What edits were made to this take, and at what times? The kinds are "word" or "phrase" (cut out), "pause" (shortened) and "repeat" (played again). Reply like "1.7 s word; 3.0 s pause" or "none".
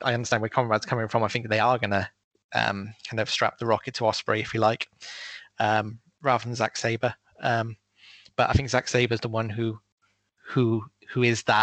none